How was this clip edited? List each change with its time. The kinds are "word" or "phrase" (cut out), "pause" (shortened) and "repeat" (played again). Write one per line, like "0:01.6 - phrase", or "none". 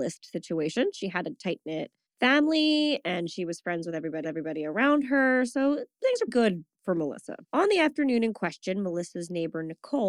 0:02.1 - pause
0:04.2 - repeat
0:06.3 - word
0:07.4 - pause